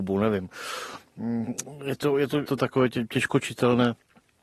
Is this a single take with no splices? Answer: no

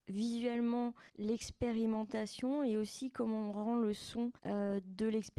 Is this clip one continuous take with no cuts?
no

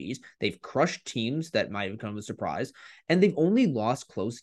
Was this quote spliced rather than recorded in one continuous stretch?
no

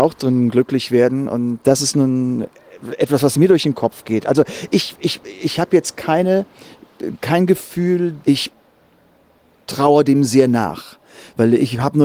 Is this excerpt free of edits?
no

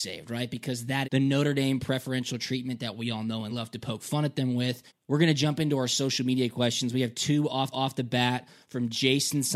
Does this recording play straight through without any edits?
no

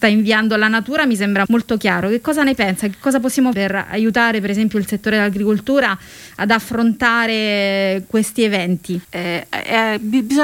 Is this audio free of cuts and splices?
no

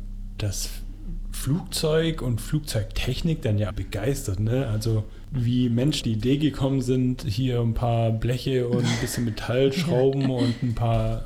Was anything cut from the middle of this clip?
yes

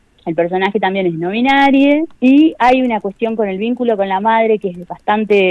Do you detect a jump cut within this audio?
yes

